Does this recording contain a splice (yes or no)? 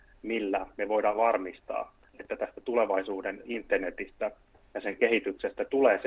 yes